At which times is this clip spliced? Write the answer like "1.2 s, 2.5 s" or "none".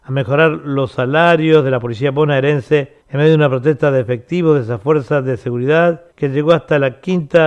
3.0 s, 6.1 s